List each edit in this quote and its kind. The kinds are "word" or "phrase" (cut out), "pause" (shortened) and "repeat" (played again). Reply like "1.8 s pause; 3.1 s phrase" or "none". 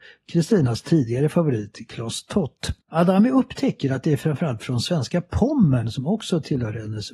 2.8 s pause